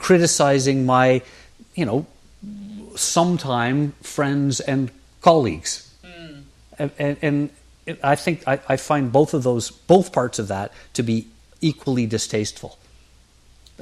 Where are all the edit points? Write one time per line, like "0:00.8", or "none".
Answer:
none